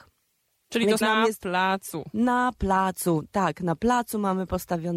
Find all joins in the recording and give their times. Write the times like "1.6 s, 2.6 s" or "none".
1.0 s